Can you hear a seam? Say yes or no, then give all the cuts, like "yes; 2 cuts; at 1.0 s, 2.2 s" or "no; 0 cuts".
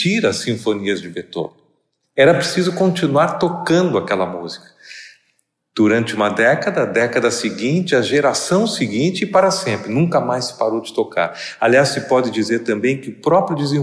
no; 0 cuts